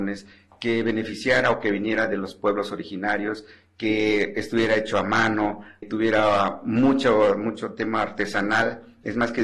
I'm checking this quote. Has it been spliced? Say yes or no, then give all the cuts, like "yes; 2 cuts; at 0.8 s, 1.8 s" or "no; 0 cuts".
yes; 1 cut; at 5.8 s